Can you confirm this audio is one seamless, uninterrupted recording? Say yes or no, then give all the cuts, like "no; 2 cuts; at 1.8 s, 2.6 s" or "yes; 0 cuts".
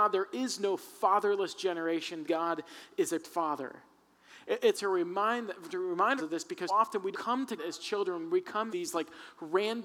no; 8 cuts; at 2.2 s, 3.2 s, 4.7 s, 6.2 s, 6.7 s, 7.1 s, 7.6 s, 8.7 s